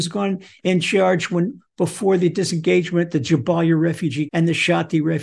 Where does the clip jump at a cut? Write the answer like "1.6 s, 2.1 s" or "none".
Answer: 4.3 s